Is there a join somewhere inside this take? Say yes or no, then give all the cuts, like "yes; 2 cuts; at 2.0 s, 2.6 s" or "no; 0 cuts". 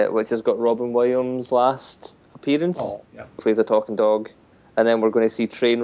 yes; 2 cuts; at 3.1 s, 3.4 s